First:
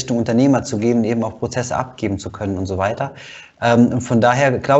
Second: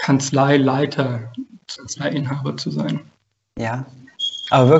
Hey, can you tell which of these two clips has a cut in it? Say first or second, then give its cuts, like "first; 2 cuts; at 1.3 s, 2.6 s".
second; 1 cut; at 1.8 s